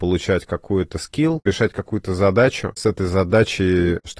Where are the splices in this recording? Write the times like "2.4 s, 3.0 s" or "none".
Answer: 1.5 s, 2.8 s